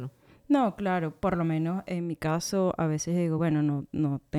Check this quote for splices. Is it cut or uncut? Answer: uncut